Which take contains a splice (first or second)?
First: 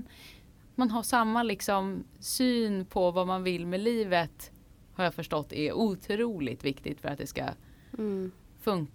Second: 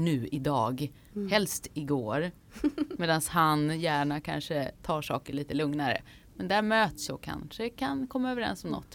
second